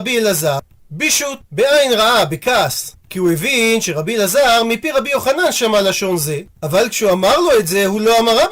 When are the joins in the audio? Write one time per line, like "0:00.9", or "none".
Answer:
0:01.4